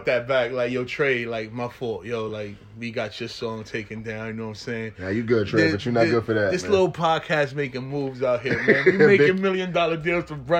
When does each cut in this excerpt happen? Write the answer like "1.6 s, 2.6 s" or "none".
none